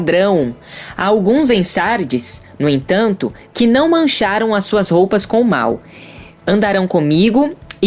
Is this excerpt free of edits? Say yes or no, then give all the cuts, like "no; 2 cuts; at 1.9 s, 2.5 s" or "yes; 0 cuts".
yes; 0 cuts